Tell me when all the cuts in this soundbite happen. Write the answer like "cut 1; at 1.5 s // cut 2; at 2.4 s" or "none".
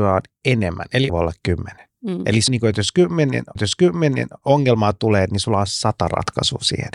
cut 1; at 1.1 s // cut 2; at 1.9 s // cut 3; at 2.5 s // cut 4; at 3.6 s